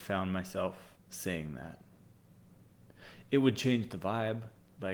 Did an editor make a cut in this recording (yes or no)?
yes